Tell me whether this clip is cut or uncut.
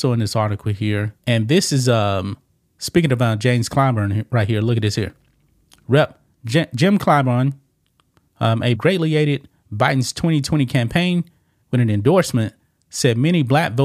cut